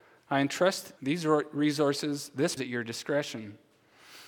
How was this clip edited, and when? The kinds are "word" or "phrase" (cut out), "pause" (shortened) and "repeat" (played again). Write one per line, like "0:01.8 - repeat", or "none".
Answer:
0:01.0 - phrase
0:02.6 - phrase